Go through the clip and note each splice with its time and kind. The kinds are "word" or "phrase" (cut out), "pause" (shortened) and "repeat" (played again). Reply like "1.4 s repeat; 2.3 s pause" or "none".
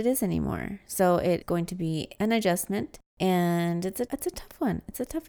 1.4 s word; 4.1 s word